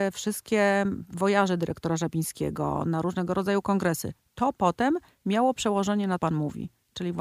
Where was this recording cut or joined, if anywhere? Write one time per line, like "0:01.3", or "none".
0:06.2